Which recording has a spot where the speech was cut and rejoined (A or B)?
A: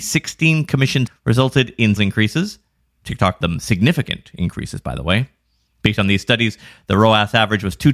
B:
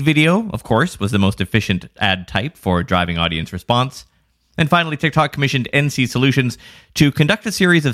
A